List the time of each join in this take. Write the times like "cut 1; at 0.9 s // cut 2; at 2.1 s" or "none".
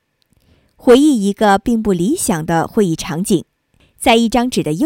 none